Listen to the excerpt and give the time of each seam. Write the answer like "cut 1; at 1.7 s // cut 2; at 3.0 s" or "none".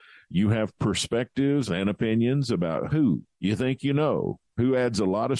cut 1; at 1.7 s // cut 2; at 2.9 s // cut 3; at 3.3 s

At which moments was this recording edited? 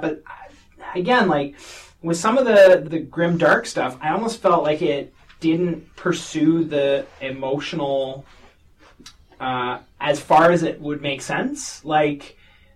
cut 1; at 2.8 s

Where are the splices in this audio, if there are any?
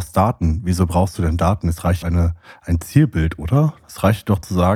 cut 1; at 2.0 s

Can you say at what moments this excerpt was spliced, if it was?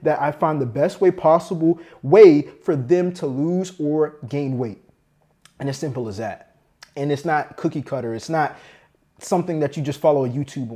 none

